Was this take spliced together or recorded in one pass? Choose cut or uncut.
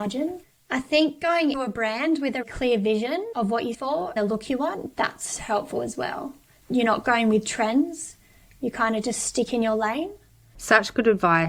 cut